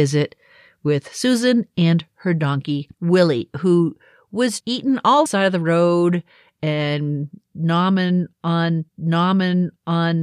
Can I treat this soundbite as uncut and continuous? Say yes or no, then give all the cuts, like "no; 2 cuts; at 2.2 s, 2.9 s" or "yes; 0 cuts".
no; 4 cuts; at 2.9 s, 4.6 s, 5.3 s, 8.9 s